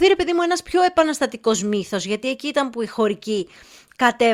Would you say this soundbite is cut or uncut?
uncut